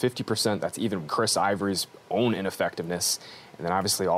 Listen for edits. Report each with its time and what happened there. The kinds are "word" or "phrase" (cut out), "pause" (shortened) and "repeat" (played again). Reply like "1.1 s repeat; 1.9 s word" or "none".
1.1 s word